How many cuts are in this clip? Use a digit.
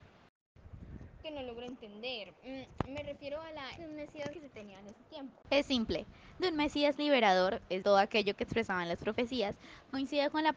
6